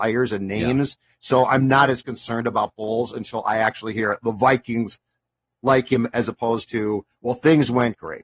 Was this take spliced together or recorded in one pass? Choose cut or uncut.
uncut